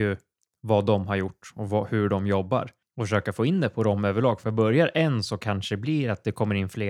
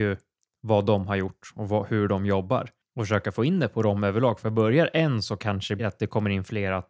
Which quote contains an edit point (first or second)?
second